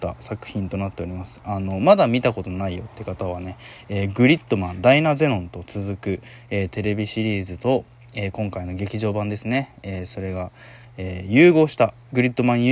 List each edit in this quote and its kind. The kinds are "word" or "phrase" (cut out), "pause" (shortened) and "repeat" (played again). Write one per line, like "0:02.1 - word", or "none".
none